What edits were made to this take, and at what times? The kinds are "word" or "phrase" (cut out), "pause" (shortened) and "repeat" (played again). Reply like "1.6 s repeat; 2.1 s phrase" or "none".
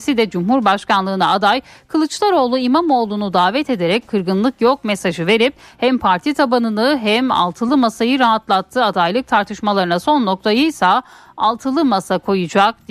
none

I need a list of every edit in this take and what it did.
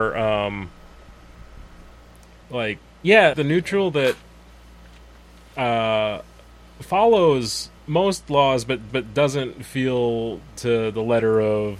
2.4 s pause; 3.3 s phrase; 7.8 s pause; 8.9 s repeat; 10.6 s word

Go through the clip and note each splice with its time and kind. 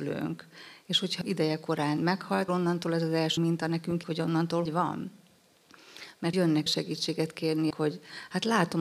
1.2 s word; 2.5 s word; 3.4 s word; 4.0 s word; 4.7 s word; 6.3 s word; 6.7 s word; 7.7 s word

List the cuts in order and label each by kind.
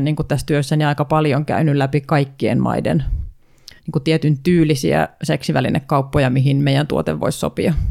3.8 s pause

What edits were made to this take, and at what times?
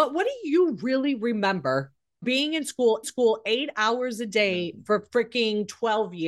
2.2 s word; 3.0 s repeat

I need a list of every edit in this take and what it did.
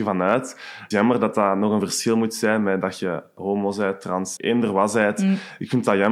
0.9 s phrase; 4.4 s word

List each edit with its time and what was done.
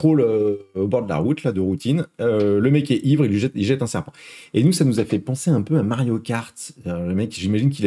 none

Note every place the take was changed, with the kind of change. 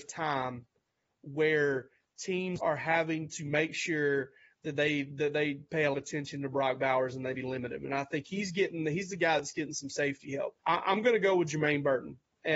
2.6 s word; 5.9 s phrase; 7.3 s word; 10.6 s pause

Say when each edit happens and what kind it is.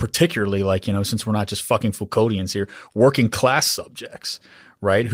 none

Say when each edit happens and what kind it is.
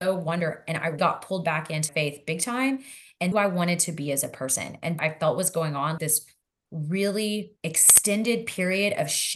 1.0 s word; 1.9 s word; 3.3 s phrase; 5.0 s phrase; 6.0 s word; 7.6 s pause

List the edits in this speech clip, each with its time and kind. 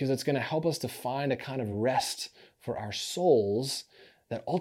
none

